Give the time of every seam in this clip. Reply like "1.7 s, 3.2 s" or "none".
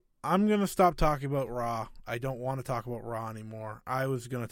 none